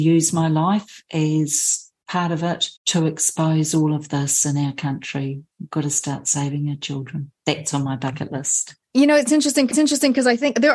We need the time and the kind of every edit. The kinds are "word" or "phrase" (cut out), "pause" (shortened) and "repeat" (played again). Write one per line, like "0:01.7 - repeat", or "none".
0:02.8 - pause
0:07.4 - pause
0:08.8 - pause
0:09.7 - repeat